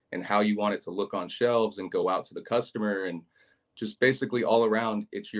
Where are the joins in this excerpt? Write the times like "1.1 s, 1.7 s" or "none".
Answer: none